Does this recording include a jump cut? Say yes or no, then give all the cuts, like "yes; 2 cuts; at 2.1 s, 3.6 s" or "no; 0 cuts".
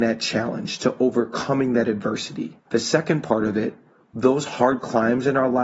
yes; 2 cuts; at 2.6 s, 3.9 s